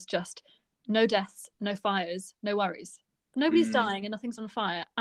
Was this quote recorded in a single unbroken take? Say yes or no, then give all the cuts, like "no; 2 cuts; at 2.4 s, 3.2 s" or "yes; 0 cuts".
yes; 0 cuts